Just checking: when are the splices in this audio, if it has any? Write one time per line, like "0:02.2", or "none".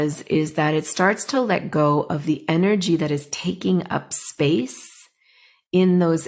none